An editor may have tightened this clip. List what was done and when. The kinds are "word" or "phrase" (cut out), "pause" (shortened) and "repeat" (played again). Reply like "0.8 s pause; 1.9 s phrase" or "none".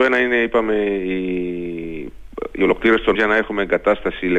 3.1 s word

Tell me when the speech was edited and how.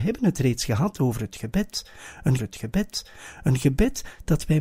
2.4 s repeat

